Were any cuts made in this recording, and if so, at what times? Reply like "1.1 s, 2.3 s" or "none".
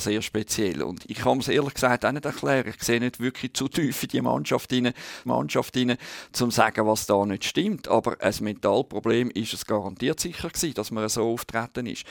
5.3 s